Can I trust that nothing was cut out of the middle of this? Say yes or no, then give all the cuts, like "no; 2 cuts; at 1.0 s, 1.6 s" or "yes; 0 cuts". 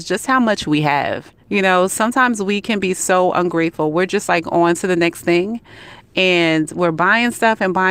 no; 1 cut; at 1.4 s